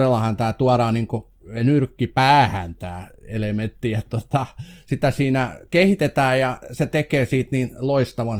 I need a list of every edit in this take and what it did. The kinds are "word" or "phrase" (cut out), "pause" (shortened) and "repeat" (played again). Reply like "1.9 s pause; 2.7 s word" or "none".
none